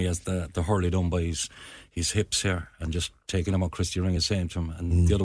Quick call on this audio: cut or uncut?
uncut